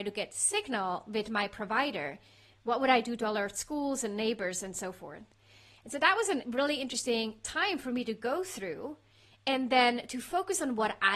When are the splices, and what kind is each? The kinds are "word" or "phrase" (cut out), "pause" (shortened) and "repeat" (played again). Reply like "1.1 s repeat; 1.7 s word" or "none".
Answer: none